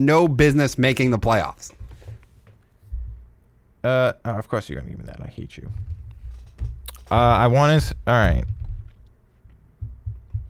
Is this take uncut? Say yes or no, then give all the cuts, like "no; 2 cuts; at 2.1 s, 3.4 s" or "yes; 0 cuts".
yes; 0 cuts